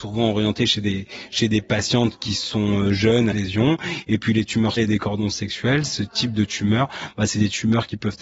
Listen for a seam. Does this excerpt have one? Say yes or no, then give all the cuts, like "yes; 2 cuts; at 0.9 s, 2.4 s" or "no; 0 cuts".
yes; 2 cuts; at 3.3 s, 4.8 s